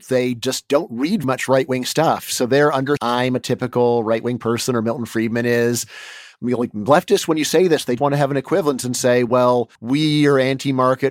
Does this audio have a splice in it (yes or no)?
yes